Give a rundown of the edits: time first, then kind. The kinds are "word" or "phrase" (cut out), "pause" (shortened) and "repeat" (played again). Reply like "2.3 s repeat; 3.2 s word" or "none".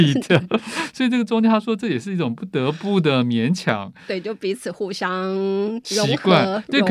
none